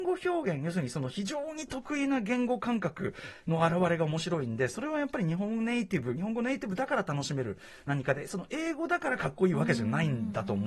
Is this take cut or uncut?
uncut